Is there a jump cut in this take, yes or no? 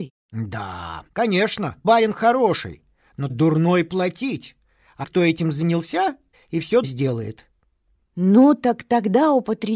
yes